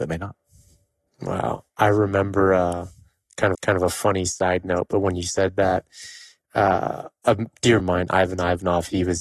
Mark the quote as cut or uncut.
cut